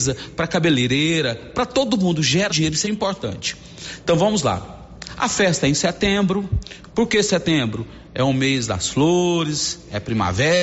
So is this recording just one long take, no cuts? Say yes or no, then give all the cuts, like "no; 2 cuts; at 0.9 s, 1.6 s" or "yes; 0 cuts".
no; 2 cuts; at 2.5 s, 2.8 s